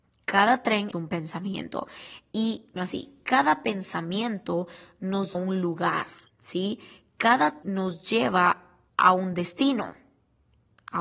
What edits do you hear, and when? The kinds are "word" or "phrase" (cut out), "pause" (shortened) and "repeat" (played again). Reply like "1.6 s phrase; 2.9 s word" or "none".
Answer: 0.9 s word; 2.8 s phrase; 5.3 s phrase; 6.3 s pause; 7.6 s word; 8.9 s pause